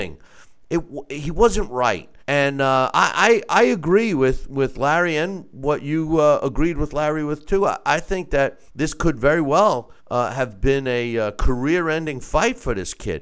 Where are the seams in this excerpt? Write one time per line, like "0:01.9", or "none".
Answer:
0:02.2
0:08.7
0:10.0